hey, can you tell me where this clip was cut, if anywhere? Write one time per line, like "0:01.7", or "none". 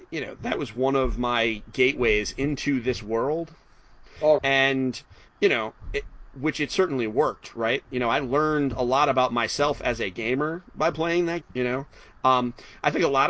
0:04.4
0:05.3
0:11.4